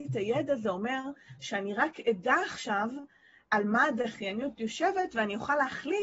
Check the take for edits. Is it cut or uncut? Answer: uncut